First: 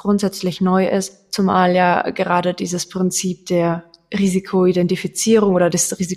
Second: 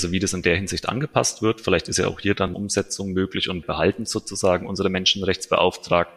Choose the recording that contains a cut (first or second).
second